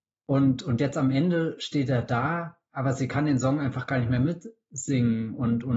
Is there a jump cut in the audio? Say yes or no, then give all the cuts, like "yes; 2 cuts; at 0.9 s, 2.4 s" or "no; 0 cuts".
no; 0 cuts